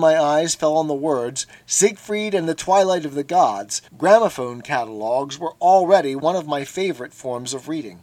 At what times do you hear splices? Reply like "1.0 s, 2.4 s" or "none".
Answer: 3.9 s